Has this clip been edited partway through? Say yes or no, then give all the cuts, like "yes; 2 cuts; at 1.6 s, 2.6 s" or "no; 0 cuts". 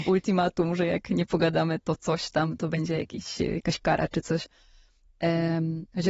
yes; 1 cut; at 1.8 s